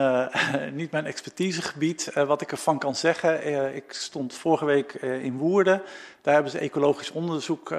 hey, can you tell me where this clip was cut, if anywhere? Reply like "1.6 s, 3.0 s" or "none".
none